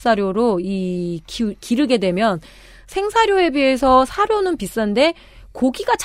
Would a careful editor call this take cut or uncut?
uncut